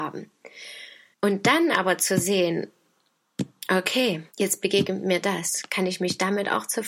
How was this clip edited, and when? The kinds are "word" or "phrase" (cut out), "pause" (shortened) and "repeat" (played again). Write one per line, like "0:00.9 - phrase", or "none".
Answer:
0:01.1 - pause
0:04.3 - pause